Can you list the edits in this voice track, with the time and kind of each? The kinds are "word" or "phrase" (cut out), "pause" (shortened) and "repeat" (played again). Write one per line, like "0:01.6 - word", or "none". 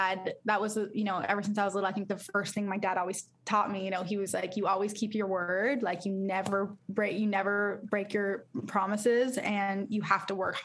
none